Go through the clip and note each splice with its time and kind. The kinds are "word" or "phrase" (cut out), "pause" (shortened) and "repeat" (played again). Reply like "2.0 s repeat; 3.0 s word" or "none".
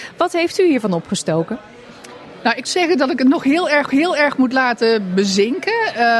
2.6 s word; 3.9 s repeat